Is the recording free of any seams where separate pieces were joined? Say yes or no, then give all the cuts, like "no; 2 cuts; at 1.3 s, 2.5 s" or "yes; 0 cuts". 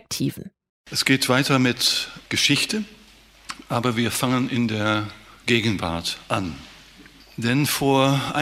yes; 0 cuts